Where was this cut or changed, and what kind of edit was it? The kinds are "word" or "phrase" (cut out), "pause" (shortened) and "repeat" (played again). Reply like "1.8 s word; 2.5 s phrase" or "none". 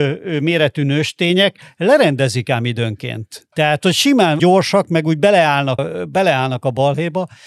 3.5 s pause; 4.4 s word; 5.8 s word